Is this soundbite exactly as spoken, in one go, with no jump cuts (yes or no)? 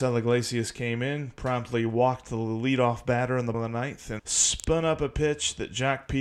no